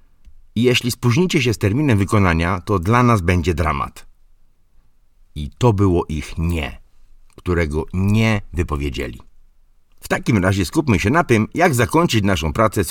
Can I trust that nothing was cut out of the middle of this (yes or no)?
yes